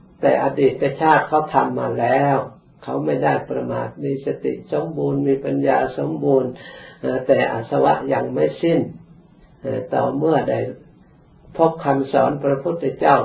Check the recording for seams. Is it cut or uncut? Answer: uncut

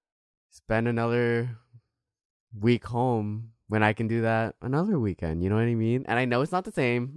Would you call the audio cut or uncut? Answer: uncut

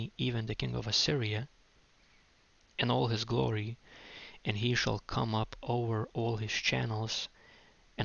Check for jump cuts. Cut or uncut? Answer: uncut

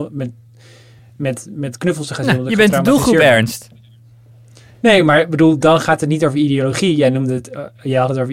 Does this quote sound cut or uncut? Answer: uncut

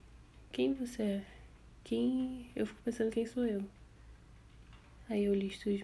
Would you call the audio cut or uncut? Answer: cut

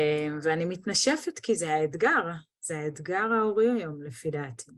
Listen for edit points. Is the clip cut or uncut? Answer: uncut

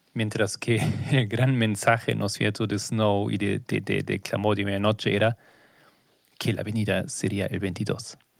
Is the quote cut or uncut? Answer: uncut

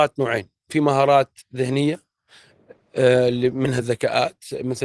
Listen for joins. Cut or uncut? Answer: uncut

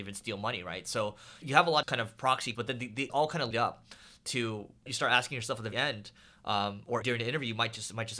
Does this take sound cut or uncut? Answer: cut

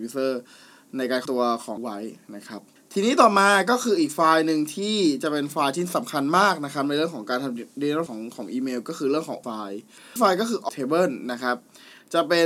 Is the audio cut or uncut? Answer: cut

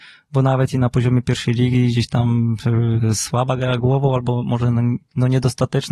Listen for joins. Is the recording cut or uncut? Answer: uncut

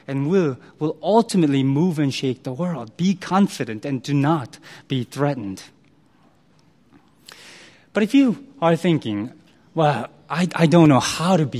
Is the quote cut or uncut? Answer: cut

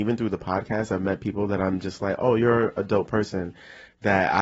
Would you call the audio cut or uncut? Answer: uncut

